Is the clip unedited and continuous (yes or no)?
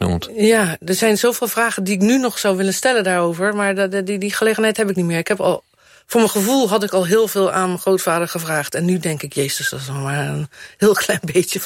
no